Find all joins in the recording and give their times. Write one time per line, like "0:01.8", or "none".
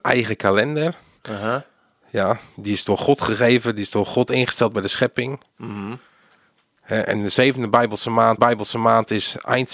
0:08.4